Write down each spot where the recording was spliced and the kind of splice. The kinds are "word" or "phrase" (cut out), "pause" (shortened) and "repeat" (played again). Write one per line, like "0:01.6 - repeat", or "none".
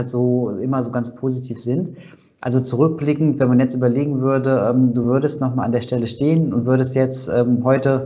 none